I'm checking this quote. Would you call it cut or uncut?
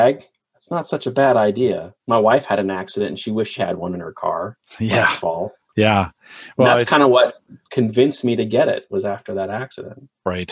cut